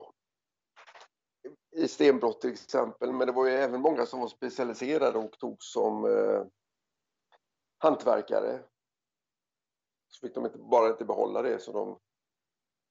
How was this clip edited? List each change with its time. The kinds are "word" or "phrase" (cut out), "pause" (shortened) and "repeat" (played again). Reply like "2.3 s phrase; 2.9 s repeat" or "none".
none